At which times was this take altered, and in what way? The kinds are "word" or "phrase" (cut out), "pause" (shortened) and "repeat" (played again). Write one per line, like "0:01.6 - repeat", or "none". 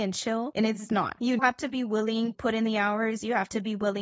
0:01.4 - word
0:02.3 - word